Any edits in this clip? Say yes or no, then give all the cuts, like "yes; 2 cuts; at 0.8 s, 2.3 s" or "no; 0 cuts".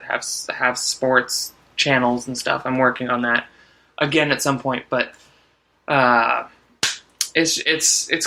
no; 0 cuts